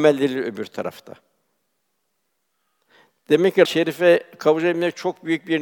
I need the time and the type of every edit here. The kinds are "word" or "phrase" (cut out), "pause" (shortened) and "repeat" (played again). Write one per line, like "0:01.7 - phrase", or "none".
0:03.7 - word